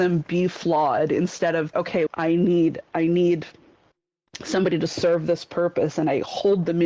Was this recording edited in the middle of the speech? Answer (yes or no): yes